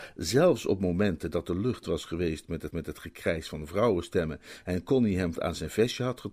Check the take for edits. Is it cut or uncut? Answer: cut